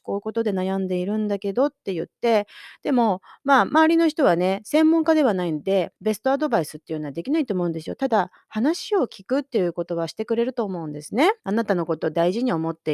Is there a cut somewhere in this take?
yes; 2 cuts; at 6.0 s, 11.4 s

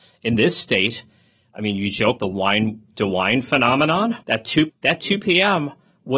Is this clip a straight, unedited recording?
no; 4 cuts; at 2.2 s, 2.9 s, 4.2 s, 4.7 s

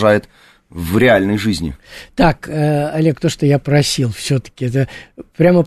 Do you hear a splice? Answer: no; 0 cuts

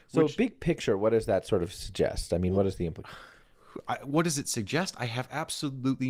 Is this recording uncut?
yes; 0 cuts

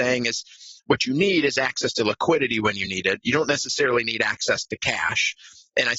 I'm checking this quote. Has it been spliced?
no; 0 cuts

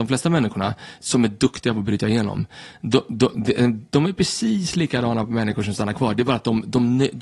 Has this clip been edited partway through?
no; 0 cuts

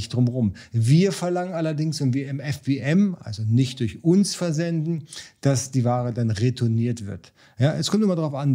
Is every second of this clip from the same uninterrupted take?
yes; 0 cuts

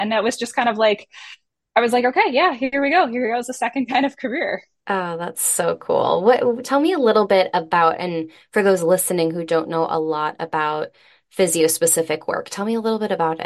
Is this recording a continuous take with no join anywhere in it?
yes; 0 cuts

